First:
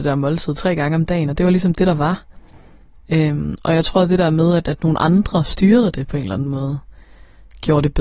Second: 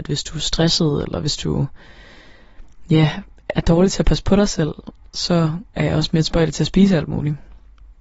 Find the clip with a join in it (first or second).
second